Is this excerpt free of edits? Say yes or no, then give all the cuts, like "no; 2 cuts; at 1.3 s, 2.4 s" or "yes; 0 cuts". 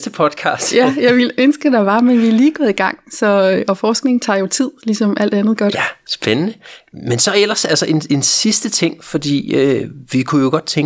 yes; 0 cuts